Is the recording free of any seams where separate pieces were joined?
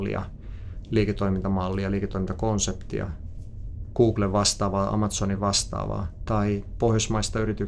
yes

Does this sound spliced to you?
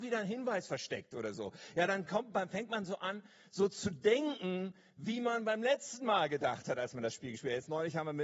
no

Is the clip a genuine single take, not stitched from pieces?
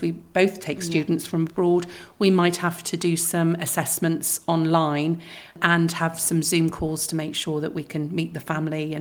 yes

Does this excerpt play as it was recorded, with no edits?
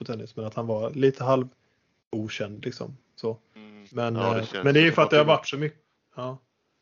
yes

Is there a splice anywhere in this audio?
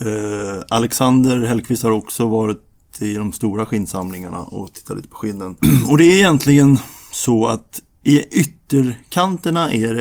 no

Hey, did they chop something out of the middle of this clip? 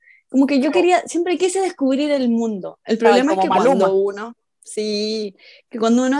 no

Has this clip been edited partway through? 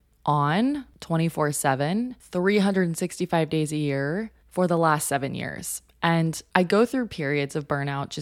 yes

